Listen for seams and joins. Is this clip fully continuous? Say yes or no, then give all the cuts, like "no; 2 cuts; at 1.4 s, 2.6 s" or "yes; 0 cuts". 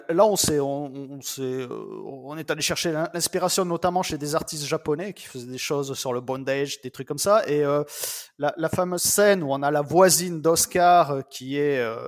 yes; 0 cuts